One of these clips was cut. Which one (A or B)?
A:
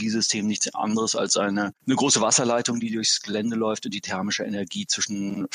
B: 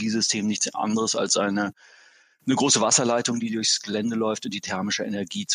A